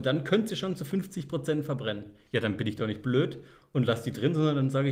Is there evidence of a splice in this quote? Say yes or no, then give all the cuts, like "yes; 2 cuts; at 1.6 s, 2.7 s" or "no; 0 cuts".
no; 0 cuts